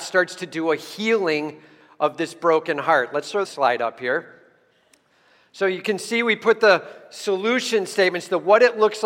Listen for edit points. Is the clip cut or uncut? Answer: cut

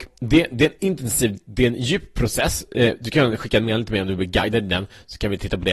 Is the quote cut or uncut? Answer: uncut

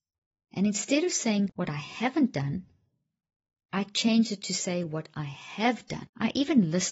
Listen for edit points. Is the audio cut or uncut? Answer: uncut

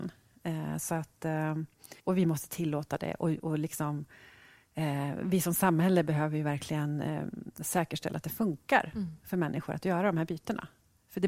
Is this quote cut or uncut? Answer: cut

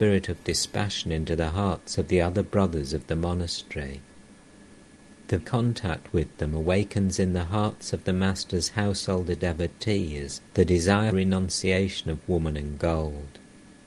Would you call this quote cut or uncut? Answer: cut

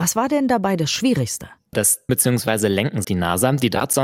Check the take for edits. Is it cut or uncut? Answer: cut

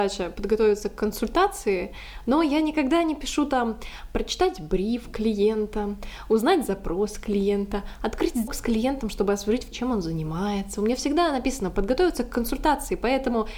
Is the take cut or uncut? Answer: cut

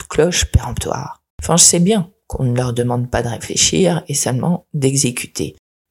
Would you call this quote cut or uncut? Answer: cut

